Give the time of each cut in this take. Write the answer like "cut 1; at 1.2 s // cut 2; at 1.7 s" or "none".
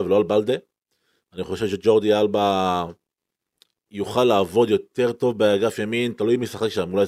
none